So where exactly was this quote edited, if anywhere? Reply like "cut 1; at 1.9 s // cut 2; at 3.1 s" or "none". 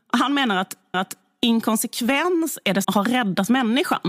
cut 1; at 0.9 s // cut 2; at 2.8 s